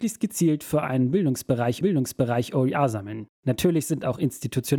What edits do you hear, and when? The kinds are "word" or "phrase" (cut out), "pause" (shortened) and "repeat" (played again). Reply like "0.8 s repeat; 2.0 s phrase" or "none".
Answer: 1.8 s repeat